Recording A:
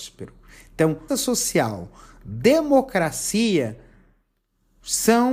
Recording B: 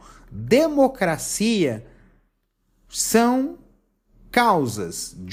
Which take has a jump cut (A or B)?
A